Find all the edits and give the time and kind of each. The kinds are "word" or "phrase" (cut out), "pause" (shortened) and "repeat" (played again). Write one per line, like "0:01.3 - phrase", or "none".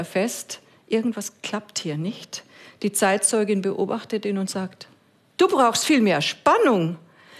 none